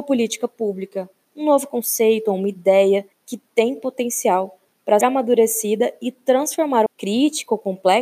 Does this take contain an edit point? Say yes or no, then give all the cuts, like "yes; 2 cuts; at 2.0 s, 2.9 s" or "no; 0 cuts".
yes; 3 cuts; at 3.1 s, 5.0 s, 6.9 s